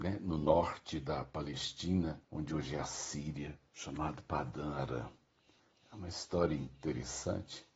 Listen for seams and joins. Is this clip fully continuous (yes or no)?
no